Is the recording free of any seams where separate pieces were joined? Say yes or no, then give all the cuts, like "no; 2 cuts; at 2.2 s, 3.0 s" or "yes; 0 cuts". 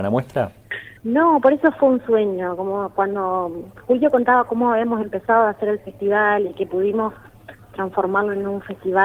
no; 1 cut; at 1.0 s